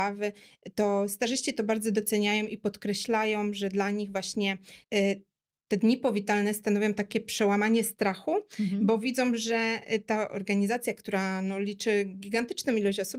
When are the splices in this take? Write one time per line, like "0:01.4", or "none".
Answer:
0:04.8